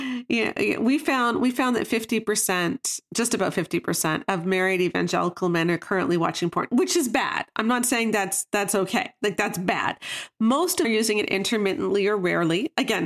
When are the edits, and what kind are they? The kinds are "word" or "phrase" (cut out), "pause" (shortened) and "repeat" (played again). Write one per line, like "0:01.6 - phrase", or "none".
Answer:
0:10.8 - word